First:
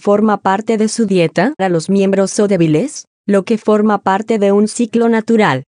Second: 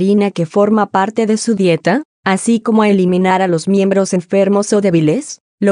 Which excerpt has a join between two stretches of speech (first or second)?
first